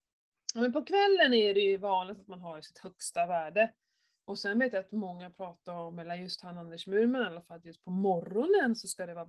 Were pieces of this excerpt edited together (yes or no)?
no